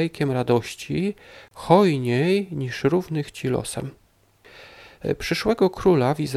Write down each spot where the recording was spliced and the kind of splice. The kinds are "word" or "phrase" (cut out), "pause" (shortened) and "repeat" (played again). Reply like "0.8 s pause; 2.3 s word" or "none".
none

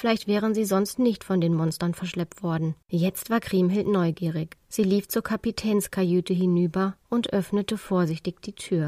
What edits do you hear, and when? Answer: 2.8 s pause; 4.6 s pause

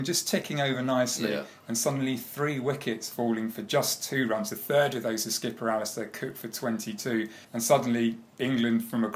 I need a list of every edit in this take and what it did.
7.4 s pause

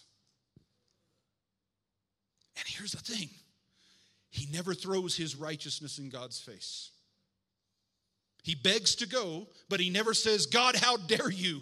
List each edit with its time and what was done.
none

